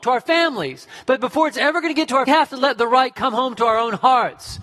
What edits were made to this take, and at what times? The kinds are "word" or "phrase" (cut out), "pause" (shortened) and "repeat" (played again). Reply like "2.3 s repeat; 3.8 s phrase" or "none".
2.3 s phrase